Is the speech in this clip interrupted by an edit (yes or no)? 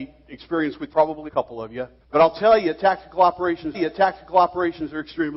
yes